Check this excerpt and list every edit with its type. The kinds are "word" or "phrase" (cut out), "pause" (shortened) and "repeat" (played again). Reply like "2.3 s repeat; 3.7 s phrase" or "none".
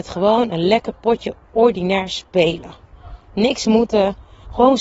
3.2 s pause